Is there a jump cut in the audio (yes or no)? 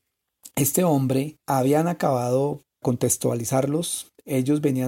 yes